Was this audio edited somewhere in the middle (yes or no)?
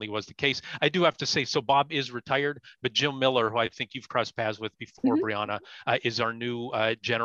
no